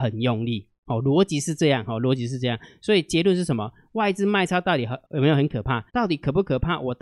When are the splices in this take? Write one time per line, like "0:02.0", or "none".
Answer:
0:05.0
0:05.9